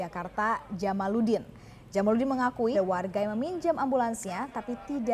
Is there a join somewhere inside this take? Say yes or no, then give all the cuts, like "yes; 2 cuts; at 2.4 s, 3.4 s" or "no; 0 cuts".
yes; 1 cut; at 2.7 s